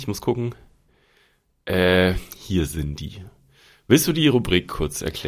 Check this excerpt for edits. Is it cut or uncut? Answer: uncut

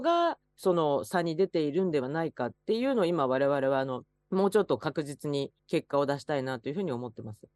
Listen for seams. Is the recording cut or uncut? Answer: cut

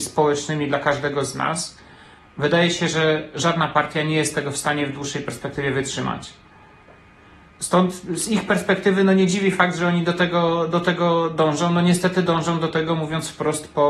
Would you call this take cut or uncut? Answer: uncut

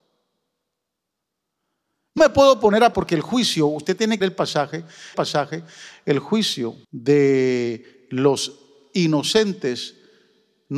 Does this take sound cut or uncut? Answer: cut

